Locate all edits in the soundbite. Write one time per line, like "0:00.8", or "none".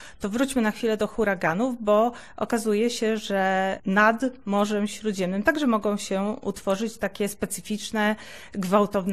none